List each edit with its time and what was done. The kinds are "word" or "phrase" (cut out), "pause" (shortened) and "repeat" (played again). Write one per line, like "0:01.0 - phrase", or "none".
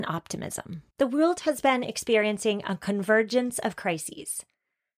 0:00.9 - pause